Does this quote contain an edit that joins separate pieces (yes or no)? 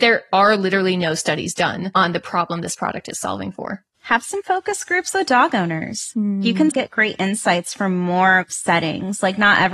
yes